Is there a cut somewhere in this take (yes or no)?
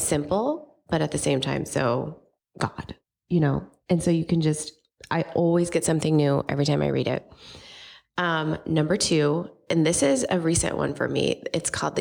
no